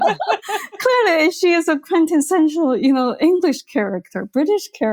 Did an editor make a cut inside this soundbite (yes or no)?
no